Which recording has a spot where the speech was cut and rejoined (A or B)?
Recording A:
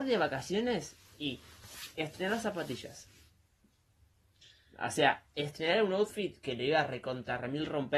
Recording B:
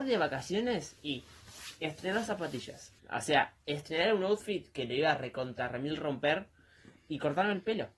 B